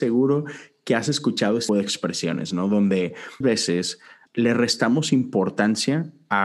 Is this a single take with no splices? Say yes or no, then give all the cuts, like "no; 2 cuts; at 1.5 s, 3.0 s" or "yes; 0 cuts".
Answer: no; 3 cuts; at 1.7 s, 3.4 s, 4.3 s